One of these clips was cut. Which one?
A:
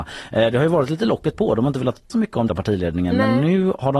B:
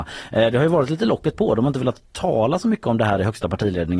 A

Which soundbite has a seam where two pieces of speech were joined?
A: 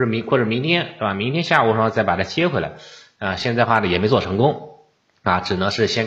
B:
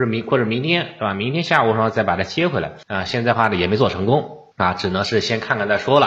B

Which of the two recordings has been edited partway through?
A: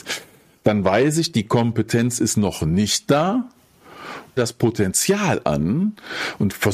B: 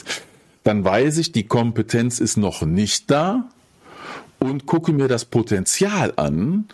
A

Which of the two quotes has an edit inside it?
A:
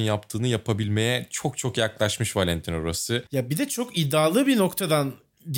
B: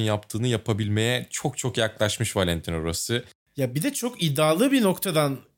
A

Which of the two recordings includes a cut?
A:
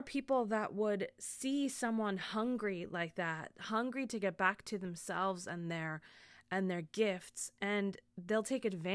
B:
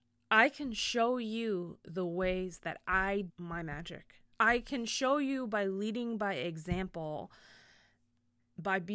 B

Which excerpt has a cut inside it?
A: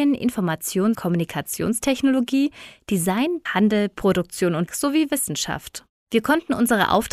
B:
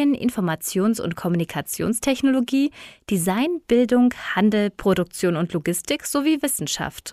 A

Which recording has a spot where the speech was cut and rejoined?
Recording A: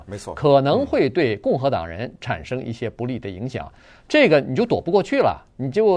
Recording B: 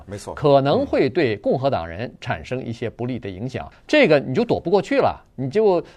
B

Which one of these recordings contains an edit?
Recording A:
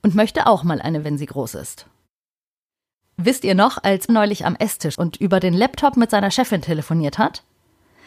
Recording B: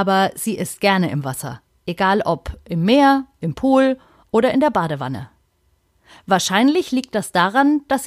A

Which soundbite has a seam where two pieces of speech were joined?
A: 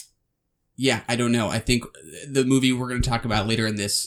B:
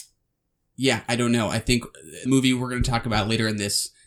B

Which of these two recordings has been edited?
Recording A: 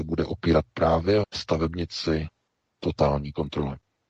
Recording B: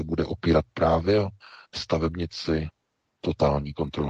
A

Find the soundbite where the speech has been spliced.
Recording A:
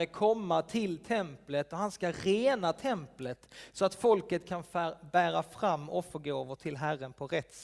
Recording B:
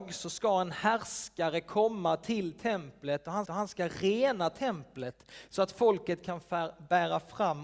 B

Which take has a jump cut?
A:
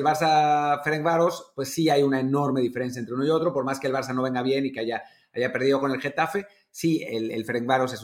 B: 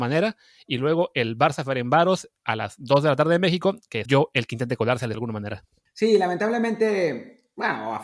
B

